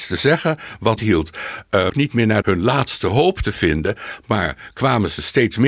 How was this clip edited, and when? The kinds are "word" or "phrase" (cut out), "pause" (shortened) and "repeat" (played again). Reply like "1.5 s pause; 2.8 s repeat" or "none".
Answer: 1.0 s phrase; 1.9 s phrase; 2.4 s phrase